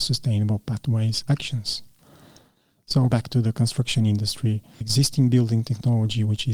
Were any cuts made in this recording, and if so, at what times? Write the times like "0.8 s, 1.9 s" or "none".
1.2 s, 3.1 s, 4.8 s